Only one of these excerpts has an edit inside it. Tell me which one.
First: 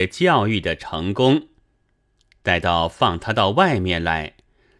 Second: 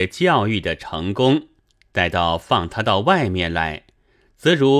second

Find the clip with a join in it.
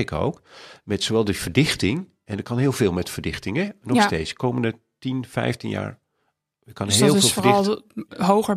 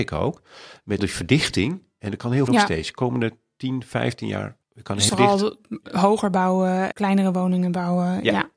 second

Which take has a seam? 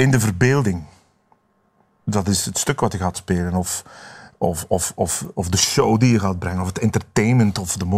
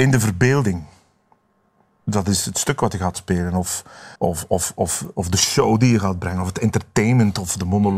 second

